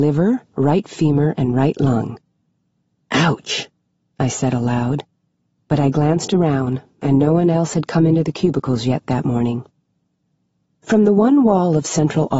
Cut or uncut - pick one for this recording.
uncut